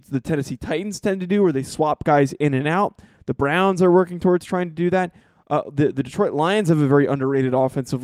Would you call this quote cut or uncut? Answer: uncut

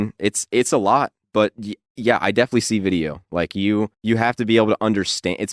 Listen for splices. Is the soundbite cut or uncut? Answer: cut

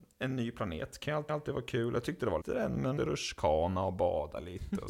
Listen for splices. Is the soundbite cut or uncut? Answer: cut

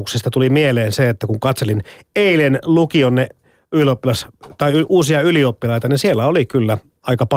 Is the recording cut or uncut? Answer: uncut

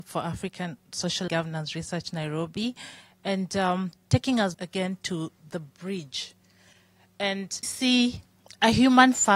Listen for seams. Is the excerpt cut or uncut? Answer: cut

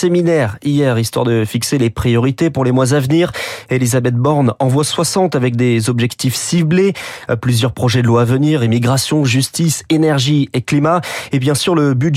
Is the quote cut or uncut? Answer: uncut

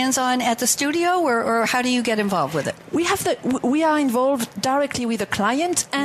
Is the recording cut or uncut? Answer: uncut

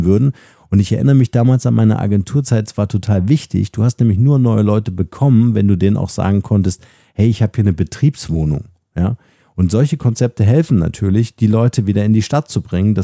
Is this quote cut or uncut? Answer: uncut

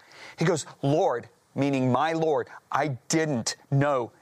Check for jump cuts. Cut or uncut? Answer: uncut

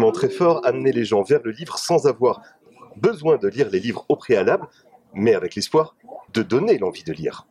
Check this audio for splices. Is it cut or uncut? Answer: cut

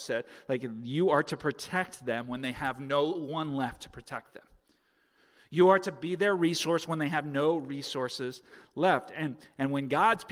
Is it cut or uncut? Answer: uncut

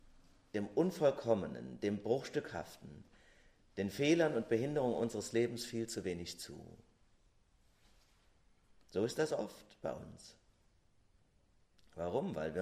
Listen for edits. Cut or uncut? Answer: uncut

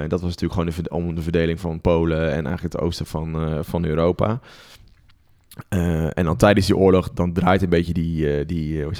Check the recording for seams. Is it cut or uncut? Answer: uncut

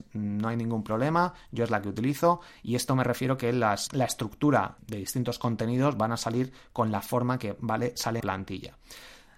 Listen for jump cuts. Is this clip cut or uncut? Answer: cut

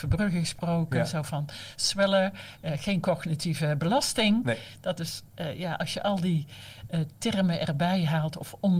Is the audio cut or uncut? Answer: uncut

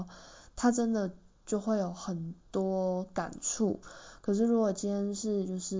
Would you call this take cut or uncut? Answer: uncut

